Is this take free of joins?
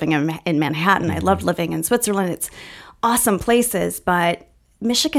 yes; 0 cuts

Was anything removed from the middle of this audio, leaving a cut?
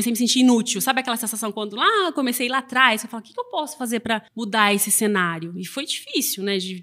yes; 1 cut; at 4.3 s

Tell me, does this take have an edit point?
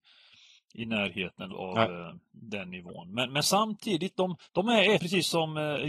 yes; 3 cuts; at 1.5 s, 4.4 s, 5.0 s

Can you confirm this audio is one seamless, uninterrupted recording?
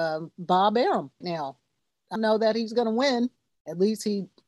no; 3 cuts; at 1.2 s, 2.2 s, 3.5 s

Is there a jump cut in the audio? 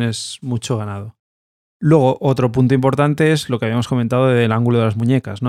no; 0 cuts

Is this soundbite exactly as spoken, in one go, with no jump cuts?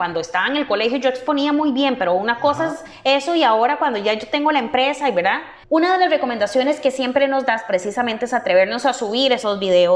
no; 1 cut; at 5.6 s

